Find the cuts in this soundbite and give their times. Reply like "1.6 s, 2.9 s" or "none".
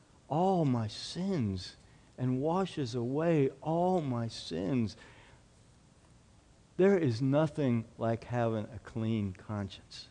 none